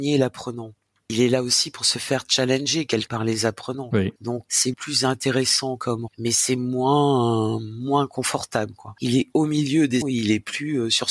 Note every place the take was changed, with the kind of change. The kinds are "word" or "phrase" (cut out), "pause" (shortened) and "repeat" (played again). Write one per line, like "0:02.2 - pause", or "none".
0:03.1 - word
0:04.7 - word
0:06.1 - word
0:10.0 - word